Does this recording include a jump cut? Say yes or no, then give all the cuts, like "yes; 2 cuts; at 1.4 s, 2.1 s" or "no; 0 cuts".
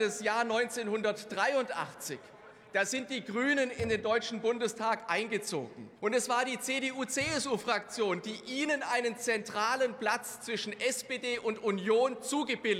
yes; 1 cut; at 6.0 s